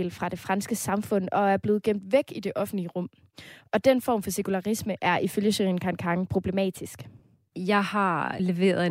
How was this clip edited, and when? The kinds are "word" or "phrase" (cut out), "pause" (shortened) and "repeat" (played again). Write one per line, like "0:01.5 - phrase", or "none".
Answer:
none